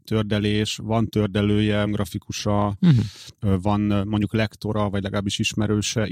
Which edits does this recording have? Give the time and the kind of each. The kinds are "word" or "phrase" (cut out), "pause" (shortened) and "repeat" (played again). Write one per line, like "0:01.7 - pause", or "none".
0:01.9 - word